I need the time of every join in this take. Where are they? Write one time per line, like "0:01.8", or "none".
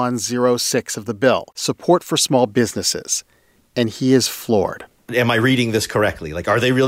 0:01.5